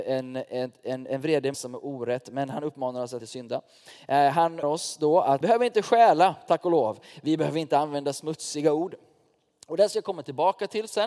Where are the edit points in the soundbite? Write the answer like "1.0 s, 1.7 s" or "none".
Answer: 1.5 s, 3.2 s, 4.6 s, 5.4 s

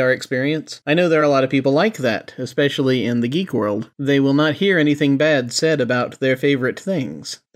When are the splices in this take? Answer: none

